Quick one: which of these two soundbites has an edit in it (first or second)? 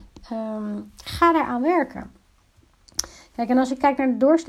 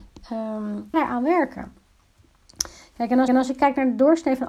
second